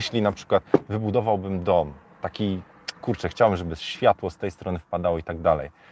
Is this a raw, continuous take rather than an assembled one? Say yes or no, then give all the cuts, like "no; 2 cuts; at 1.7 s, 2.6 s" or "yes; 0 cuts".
yes; 0 cuts